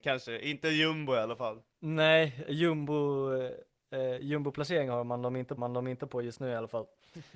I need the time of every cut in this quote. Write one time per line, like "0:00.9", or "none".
0:01.7
0:05.6

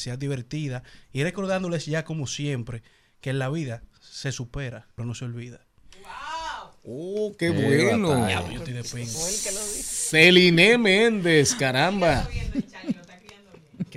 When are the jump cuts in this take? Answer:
0:05.0

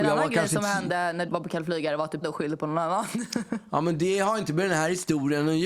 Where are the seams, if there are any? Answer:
0:01.3
0:02.2

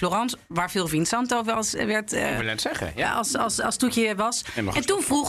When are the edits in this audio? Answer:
none

